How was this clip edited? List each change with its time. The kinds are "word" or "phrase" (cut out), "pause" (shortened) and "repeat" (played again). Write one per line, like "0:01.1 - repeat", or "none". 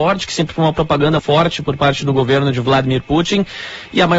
0:01.2 - word